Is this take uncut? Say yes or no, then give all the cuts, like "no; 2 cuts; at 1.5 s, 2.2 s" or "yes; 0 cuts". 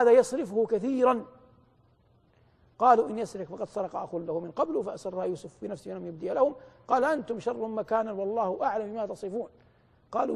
yes; 0 cuts